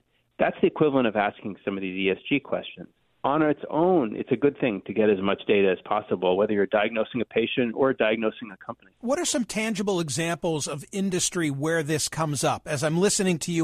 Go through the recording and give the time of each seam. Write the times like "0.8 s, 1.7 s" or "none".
3.0 s, 8.9 s